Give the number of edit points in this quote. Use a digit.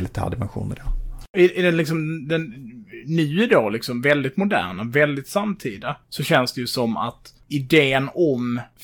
2